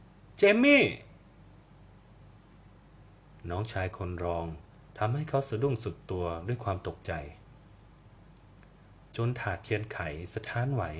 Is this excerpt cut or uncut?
uncut